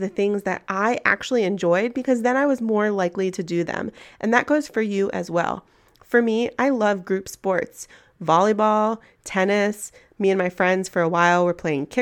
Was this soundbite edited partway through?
no; 0 cuts

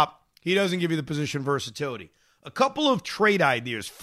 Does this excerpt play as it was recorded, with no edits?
yes; 0 cuts

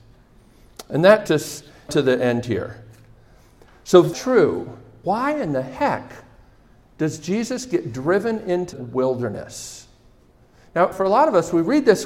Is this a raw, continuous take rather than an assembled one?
no; 6 cuts; at 1.3 s, 1.9 s, 4.1 s, 5.0 s, 8.7 s, 10.9 s

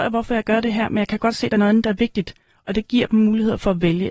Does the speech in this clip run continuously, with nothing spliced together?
yes; 0 cuts

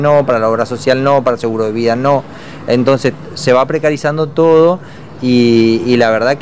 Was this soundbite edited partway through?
no; 0 cuts

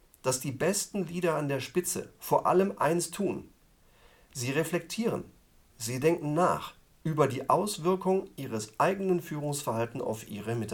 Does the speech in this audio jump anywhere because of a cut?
no; 0 cuts

